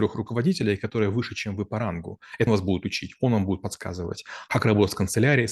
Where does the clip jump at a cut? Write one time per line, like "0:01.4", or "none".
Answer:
0:02.5